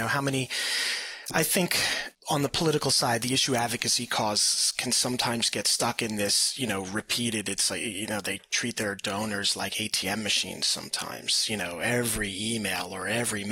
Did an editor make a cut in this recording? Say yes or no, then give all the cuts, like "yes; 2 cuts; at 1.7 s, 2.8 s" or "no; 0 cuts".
yes; 1 cut; at 2.1 s